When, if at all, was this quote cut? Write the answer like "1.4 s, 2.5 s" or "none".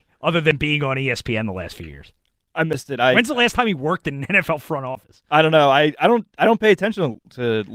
none